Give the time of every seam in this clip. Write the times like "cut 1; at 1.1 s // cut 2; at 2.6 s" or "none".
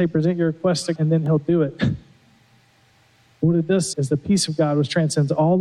cut 1; at 1.0 s // cut 2; at 3.9 s